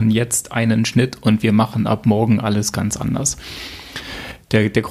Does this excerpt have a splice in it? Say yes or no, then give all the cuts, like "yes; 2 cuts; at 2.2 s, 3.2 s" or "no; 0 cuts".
no; 0 cuts